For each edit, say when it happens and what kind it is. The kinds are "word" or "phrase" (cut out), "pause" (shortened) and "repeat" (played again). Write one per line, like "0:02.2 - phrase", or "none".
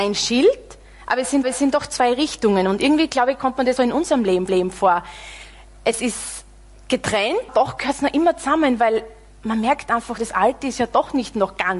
0:01.4 - repeat
0:03.8 - phrase
0:04.5 - repeat
0:07.5 - word
0:10.2 - word